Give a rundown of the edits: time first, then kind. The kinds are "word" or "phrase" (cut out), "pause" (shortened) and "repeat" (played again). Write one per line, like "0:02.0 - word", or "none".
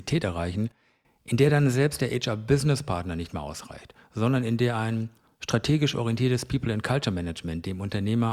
none